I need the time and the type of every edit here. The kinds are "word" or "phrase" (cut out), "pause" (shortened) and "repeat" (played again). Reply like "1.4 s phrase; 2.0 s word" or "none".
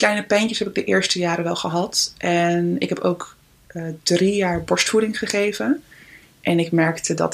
none